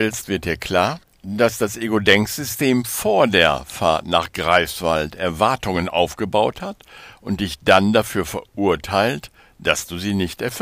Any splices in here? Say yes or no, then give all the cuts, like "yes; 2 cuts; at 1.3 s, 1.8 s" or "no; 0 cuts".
yes; 1 cut; at 1.0 s